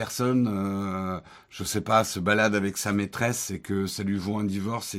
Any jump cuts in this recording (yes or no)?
no